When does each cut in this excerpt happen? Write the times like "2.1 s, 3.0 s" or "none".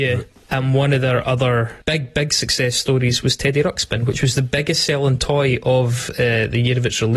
1.8 s